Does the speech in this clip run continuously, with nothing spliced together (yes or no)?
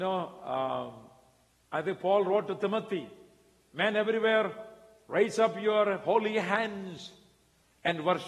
yes